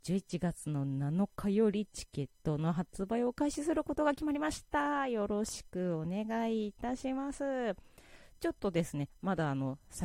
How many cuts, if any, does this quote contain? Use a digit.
1